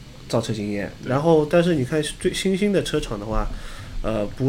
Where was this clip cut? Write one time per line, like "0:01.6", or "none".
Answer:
0:01.0